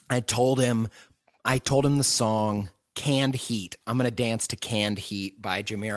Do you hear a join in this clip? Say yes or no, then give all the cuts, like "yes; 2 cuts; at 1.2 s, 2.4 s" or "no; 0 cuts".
no; 0 cuts